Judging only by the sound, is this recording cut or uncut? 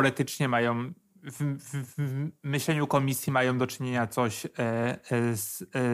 uncut